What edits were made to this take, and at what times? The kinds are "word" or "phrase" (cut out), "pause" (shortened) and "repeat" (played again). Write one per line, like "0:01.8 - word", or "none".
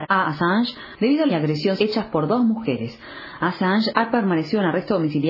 0:01.3 - phrase
0:01.8 - word